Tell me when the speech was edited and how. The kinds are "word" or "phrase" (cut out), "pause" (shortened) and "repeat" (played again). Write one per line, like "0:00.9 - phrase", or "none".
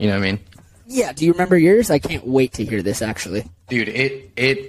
0:03.6 - pause